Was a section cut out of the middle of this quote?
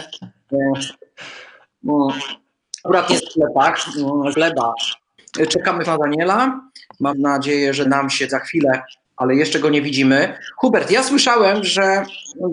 yes; 8 cuts; at 2.8 s, 3.2 s, 4.3 s, 5.8 s, 7.1 s, 7.8 s, 8.3 s, 9.0 s

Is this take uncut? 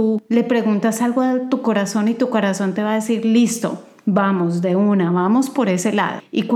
yes; 0 cuts

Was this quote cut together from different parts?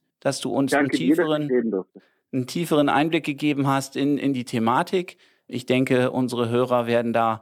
no; 0 cuts

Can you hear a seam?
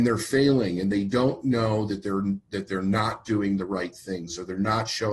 no; 0 cuts

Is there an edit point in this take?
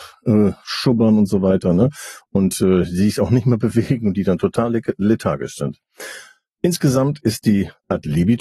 no; 0 cuts

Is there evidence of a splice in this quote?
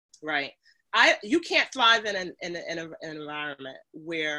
no; 0 cuts

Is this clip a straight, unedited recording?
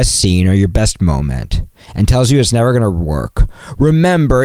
yes; 0 cuts

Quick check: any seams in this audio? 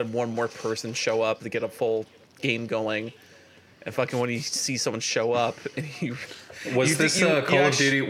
no; 0 cuts

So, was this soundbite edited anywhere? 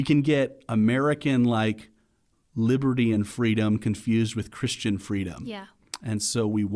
no; 0 cuts

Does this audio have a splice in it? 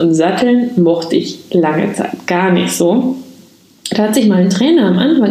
no; 0 cuts

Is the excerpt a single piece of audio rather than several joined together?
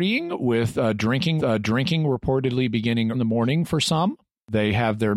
no; 2 cuts; at 1.4 s, 3.1 s

